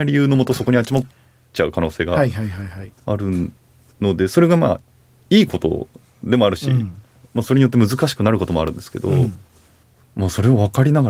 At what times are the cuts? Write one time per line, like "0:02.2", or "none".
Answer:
none